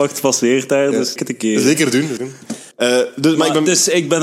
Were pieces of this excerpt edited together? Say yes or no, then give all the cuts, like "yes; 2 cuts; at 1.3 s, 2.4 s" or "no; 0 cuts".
yes; 3 cuts; at 1.2 s, 2.2 s, 2.7 s